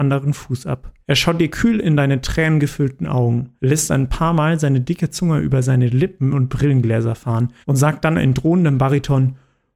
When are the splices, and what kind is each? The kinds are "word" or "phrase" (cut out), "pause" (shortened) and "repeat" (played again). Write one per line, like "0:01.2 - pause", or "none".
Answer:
0:01.0 - pause
0:03.6 - pause
0:07.6 - pause